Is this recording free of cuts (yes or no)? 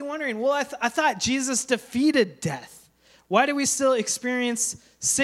yes